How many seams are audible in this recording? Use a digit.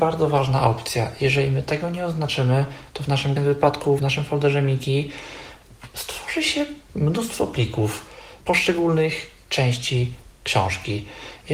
2